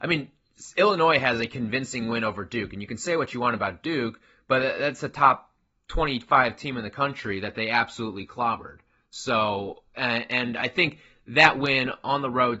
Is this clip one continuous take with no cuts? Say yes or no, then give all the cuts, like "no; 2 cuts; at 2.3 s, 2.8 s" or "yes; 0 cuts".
yes; 0 cuts